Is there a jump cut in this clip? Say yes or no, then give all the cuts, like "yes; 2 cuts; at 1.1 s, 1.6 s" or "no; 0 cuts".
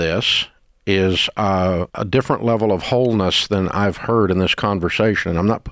yes; 1 cut; at 1.9 s